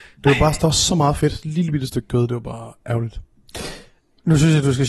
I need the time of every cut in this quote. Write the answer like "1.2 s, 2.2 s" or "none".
none